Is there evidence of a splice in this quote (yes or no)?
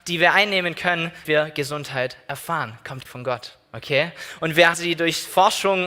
yes